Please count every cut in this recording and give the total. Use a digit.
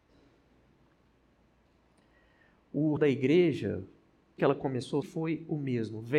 3